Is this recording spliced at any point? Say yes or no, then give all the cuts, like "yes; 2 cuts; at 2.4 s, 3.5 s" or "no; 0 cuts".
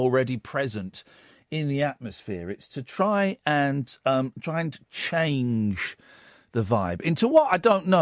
no; 0 cuts